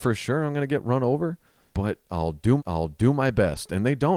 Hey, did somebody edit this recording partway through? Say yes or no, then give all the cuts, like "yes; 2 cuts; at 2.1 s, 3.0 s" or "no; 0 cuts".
yes; 2 cuts; at 1.7 s, 2.6 s